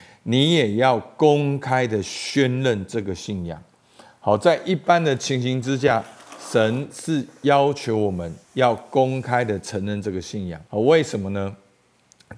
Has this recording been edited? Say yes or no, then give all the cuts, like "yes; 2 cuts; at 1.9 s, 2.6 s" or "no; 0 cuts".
yes; 2 cuts; at 8.4 s, 10.6 s